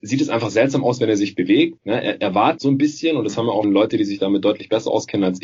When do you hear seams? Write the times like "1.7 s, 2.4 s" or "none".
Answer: 2.6 s, 3.6 s